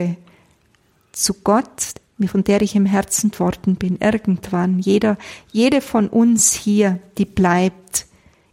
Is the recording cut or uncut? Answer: cut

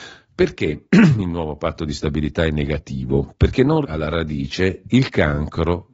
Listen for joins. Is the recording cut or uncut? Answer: cut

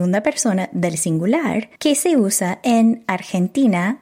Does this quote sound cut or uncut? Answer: cut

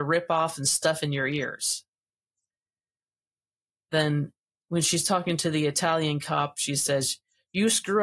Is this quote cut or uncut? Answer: uncut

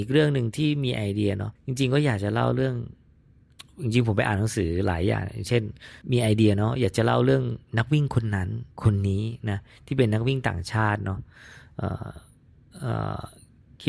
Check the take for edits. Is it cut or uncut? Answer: cut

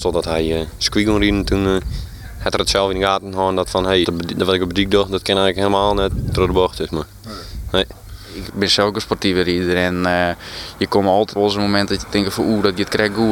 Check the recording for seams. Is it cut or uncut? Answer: cut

